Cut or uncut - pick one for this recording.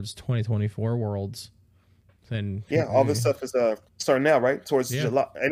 cut